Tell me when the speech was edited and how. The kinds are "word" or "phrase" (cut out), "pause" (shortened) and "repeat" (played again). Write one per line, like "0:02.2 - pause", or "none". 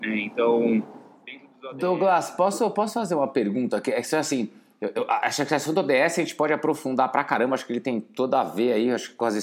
none